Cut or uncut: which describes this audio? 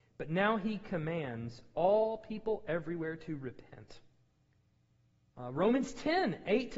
uncut